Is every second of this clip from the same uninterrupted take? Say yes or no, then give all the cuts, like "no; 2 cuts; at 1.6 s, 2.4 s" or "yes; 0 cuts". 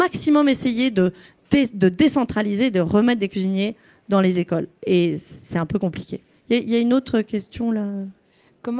yes; 0 cuts